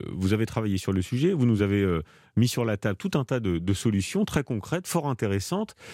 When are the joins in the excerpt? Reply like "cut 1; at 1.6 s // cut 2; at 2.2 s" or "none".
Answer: none